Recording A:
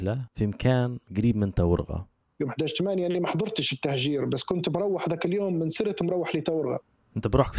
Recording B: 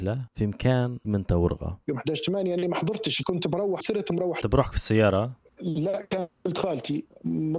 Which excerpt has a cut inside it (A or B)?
B